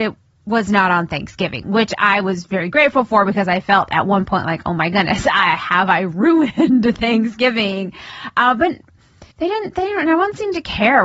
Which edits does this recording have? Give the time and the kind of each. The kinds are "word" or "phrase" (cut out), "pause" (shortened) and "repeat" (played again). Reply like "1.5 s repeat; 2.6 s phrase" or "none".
9.3 s pause